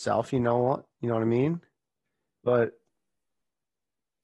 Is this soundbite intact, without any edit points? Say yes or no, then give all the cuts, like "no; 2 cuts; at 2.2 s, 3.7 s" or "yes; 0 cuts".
yes; 0 cuts